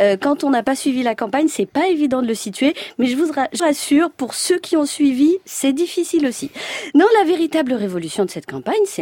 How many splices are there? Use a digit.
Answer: 1